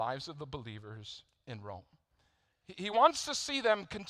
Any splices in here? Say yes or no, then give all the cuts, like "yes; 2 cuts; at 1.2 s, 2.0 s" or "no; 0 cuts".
no; 0 cuts